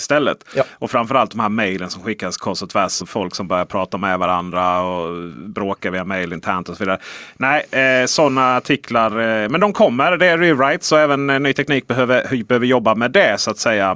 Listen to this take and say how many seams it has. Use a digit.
1